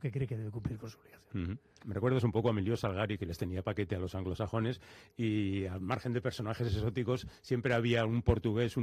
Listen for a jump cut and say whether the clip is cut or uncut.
uncut